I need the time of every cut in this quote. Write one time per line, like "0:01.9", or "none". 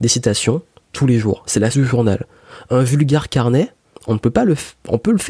0:01.7
0:03.8